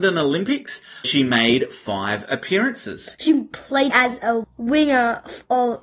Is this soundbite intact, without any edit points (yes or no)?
no